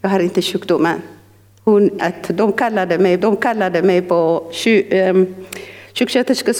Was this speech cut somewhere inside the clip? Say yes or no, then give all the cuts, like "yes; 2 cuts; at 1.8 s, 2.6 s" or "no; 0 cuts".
yes; 2 cuts; at 2.0 s, 3.2 s